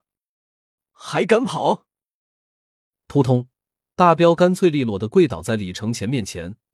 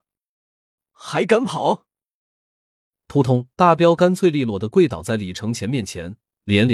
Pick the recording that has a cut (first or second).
second